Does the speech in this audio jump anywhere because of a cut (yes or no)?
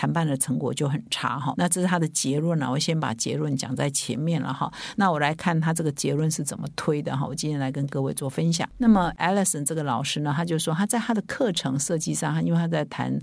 no